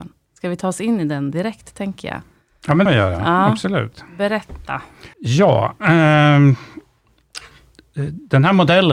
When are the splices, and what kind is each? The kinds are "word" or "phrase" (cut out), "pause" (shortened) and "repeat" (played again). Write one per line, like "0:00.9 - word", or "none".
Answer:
0:02.9 - phrase
0:05.1 - pause